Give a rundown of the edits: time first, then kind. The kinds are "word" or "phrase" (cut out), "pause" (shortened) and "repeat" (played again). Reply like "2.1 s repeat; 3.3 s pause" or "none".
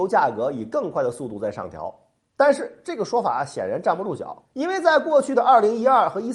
4.4 s pause